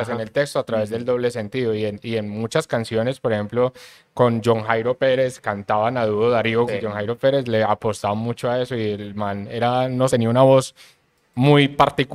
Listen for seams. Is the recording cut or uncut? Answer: cut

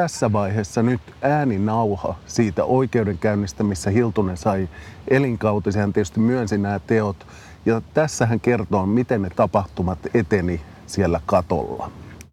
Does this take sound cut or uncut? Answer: uncut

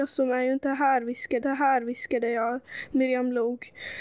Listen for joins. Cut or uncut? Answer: cut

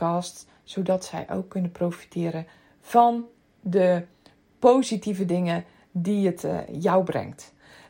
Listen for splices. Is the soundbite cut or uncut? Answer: uncut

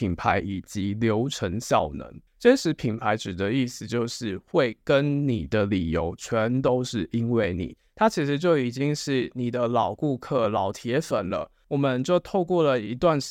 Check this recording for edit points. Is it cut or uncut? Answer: cut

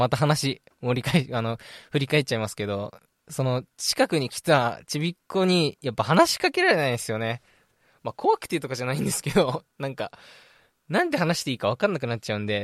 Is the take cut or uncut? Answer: uncut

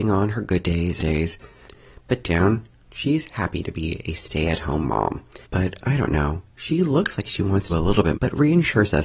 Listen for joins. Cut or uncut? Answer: cut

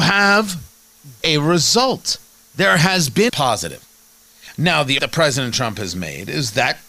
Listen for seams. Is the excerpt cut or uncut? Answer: cut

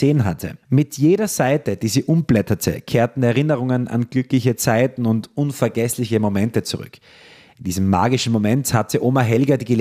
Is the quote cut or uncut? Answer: uncut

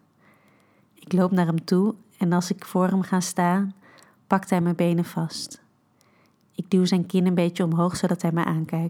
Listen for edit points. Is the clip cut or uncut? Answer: uncut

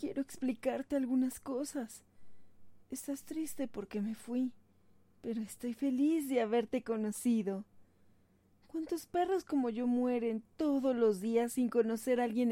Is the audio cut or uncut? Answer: uncut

